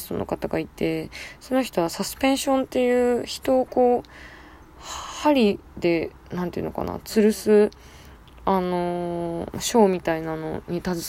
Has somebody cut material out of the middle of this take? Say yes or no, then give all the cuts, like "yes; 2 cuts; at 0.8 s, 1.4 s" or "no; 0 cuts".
no; 0 cuts